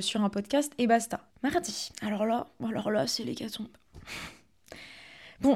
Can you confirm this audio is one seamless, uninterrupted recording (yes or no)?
no